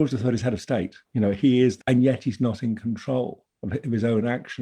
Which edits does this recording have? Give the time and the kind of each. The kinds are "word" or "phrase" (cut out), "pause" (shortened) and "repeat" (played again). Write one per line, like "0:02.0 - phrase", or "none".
0:01.0 - pause
0:01.8 - word